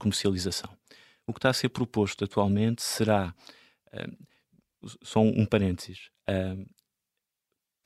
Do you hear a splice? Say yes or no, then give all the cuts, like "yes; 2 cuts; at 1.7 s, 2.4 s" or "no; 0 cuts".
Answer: no; 0 cuts